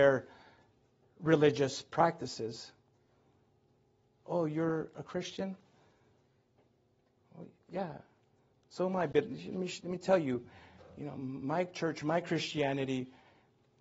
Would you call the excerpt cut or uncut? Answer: uncut